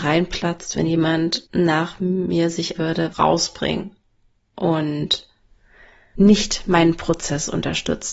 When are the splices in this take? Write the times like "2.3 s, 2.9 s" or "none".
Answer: 1.5 s, 2.8 s, 3.1 s, 6.2 s